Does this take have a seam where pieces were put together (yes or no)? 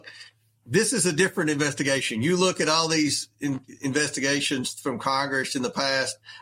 no